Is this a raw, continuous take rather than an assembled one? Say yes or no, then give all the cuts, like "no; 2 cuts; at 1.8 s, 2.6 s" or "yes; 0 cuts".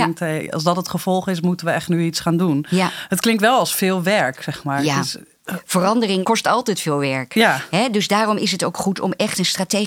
yes; 0 cuts